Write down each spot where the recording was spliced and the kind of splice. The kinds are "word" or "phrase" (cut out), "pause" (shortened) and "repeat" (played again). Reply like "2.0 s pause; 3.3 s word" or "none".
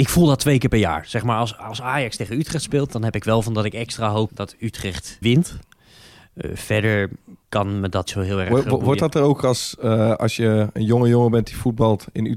4.3 s word; 5.2 s word; 7.4 s pause; 8.1 s word